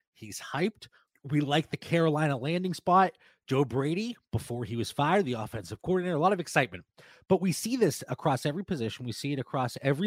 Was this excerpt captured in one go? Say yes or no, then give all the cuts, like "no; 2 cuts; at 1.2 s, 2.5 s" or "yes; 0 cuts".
yes; 0 cuts